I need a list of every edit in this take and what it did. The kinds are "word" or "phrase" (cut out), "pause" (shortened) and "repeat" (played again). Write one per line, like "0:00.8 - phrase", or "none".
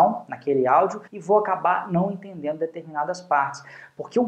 0:01.1 - pause